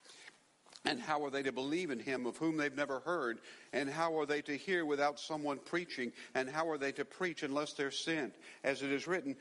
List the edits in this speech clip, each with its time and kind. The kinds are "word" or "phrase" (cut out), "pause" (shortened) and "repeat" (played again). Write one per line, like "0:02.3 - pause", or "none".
none